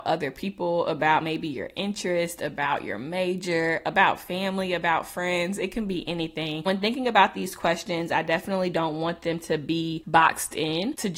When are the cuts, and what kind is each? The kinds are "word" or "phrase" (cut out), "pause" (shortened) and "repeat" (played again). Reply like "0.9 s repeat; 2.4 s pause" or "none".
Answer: none